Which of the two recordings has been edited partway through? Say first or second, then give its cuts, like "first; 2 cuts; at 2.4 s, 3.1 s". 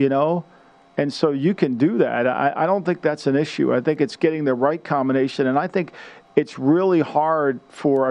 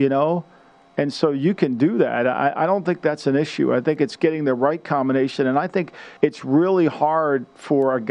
second; 1 cut; at 6.2 s